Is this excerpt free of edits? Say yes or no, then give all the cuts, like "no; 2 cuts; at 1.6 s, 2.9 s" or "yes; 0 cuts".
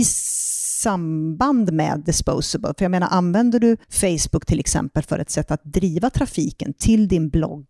yes; 0 cuts